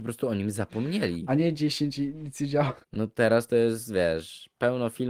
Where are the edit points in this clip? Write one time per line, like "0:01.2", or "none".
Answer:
0:02.8